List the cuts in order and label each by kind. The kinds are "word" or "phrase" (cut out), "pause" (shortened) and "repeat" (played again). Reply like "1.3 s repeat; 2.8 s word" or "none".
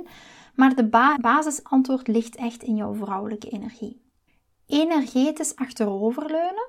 1.1 s word; 4.3 s pause